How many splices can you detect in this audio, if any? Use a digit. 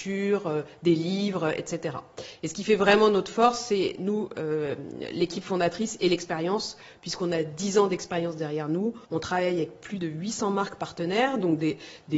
1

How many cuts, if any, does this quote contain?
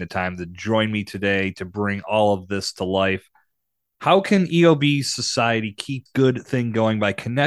1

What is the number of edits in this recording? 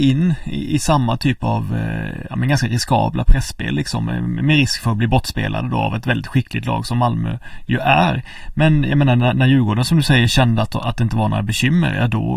0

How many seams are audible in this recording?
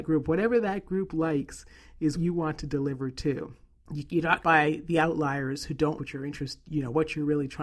3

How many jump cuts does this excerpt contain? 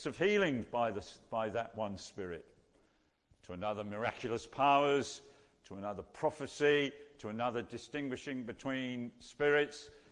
0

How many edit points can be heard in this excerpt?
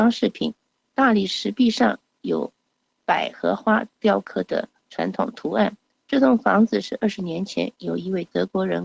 1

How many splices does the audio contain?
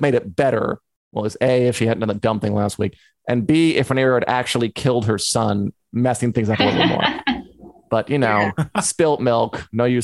0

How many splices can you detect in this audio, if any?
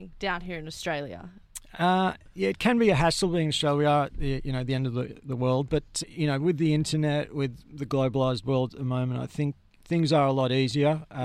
1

